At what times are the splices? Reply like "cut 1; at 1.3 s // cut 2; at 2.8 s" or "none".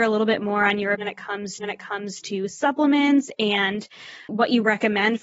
cut 1; at 0.9 s // cut 2; at 1.6 s // cut 3; at 4.3 s